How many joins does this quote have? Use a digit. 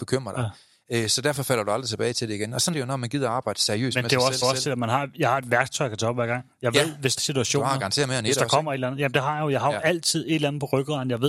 3